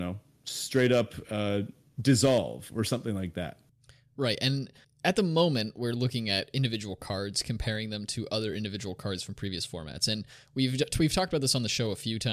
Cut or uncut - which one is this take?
uncut